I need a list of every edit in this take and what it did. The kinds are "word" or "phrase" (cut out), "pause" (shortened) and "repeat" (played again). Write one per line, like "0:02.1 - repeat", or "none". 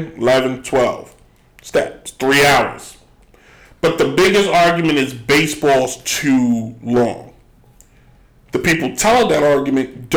none